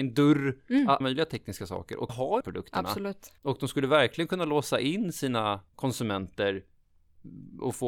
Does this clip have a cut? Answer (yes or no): yes